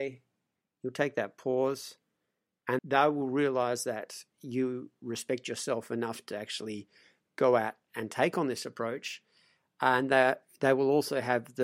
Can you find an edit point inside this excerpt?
yes; 1 cut; at 2.8 s

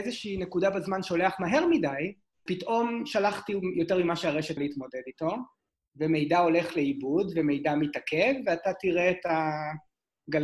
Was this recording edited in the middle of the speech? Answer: yes; 2 cuts; at 2.5 s, 4.6 s

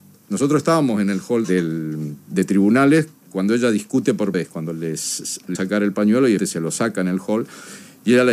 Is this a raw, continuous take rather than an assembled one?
no; 4 cuts; at 1.4 s, 4.3 s, 5.5 s, 6.4 s

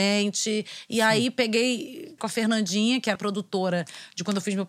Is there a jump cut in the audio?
yes; 2 cuts; at 2.2 s, 3.2 s

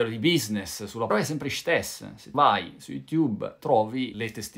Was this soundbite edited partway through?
yes; 3 cuts; at 1.1 s, 2.3 s, 3.6 s

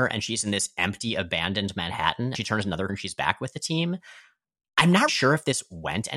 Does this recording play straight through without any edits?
no; 3 cuts; at 2.3 s, 2.9 s, 5.1 s

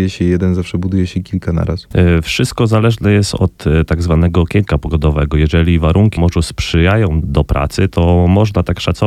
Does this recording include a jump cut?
yes; 2 cuts; at 6.2 s, 7.2 s

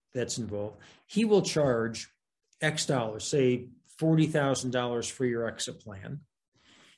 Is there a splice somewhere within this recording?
no; 0 cuts

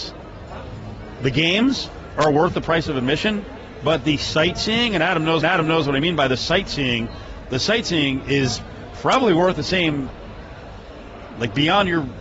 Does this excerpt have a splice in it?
yes; 1 cut; at 5.4 s

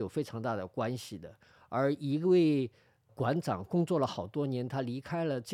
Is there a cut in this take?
no; 0 cuts

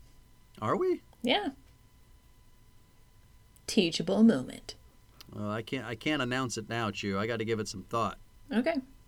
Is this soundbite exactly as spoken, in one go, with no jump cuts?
yes; 0 cuts

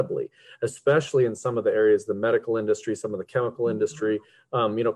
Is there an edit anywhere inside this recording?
no; 0 cuts

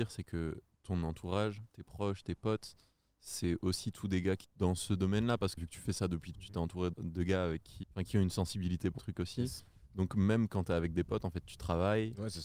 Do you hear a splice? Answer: yes; 6 cuts; at 4.4 s, 5.6 s, 6.3 s, 6.9 s, 7.8 s, 9.0 s

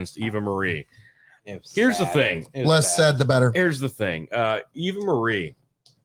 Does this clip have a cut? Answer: no; 0 cuts

